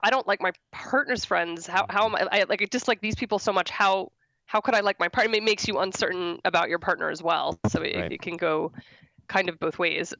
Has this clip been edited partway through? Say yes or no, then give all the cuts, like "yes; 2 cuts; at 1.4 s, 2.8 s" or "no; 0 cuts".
no; 0 cuts